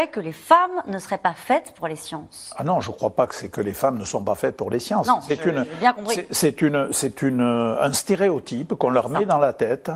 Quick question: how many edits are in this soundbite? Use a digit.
0